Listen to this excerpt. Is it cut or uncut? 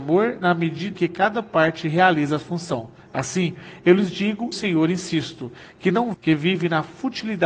cut